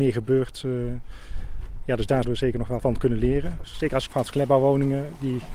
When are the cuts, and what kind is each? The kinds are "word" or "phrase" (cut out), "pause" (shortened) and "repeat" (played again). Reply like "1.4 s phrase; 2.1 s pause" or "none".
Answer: 2.2 s word; 2.8 s word; 4.1 s phrase